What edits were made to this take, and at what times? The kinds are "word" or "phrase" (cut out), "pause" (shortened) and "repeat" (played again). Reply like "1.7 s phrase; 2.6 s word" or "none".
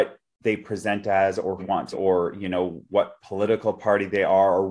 1.6 s phrase; 1.9 s word